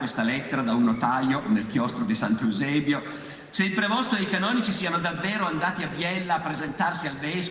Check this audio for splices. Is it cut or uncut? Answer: uncut